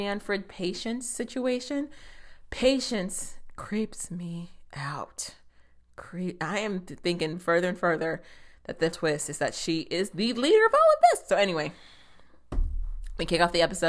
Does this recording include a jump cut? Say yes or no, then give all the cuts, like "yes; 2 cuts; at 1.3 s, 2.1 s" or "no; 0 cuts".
yes; 1 cut; at 8.9 s